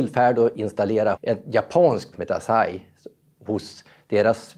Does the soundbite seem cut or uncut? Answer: cut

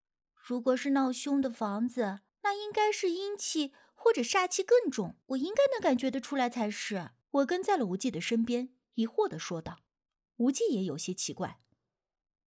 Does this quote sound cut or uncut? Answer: cut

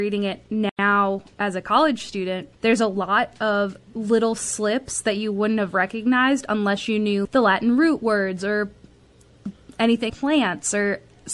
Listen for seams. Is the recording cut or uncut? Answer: cut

